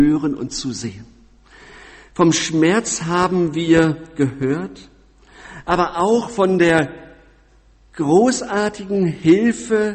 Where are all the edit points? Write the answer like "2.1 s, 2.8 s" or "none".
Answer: none